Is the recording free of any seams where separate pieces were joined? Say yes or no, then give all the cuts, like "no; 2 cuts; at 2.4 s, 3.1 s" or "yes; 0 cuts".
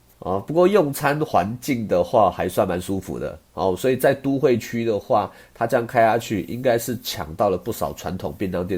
yes; 0 cuts